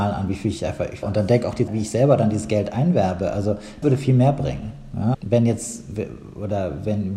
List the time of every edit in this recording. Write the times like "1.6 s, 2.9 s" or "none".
1.0 s, 1.7 s, 3.8 s, 5.1 s